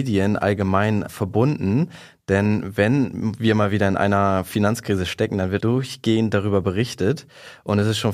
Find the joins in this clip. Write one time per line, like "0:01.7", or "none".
0:05.6